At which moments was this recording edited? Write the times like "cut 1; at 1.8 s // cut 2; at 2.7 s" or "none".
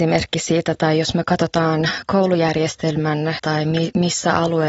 cut 1; at 3.4 s